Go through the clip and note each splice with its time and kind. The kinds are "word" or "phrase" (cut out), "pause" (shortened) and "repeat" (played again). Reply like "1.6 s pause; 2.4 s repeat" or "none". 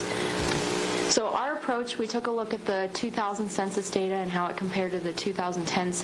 none